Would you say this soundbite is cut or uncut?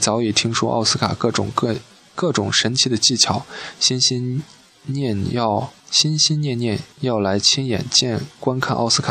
cut